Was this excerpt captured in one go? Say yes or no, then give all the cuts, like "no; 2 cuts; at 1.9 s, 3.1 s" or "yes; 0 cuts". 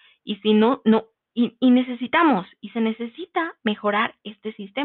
yes; 0 cuts